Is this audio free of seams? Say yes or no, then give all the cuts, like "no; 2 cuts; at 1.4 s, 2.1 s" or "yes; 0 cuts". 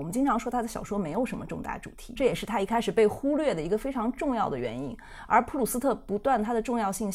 no; 1 cut; at 2.2 s